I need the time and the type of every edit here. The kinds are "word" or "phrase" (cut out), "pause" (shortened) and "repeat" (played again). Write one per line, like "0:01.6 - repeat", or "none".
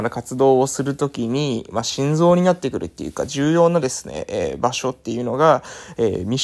none

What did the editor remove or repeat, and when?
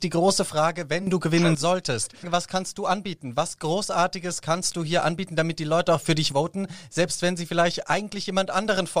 none

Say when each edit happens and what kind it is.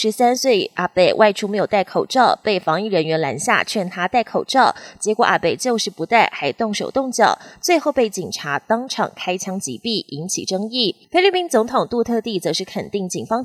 0:11.0 - pause

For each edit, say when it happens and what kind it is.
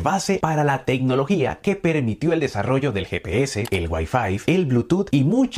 none

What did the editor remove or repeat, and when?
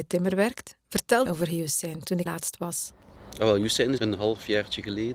0:01.3 - word
0:02.3 - word
0:04.0 - phrase

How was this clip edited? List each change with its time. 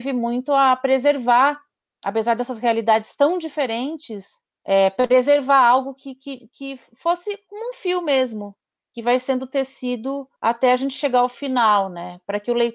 0:10.4 - pause

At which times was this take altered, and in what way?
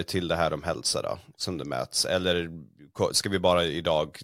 none

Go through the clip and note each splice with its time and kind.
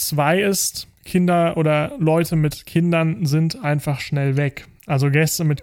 0:01.0 - pause

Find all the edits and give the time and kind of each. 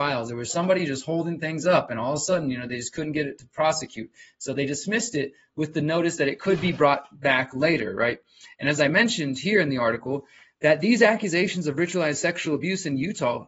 none

